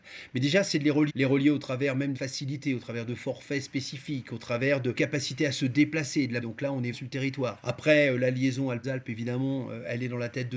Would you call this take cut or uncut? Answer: cut